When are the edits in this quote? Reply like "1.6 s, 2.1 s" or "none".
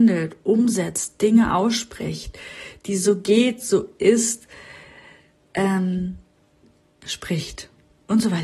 none